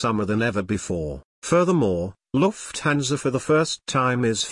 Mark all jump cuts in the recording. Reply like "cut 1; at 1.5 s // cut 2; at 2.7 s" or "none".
cut 1; at 1.3 s